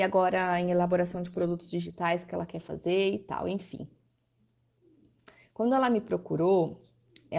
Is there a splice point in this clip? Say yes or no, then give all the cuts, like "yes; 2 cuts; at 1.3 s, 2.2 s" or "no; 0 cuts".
no; 0 cuts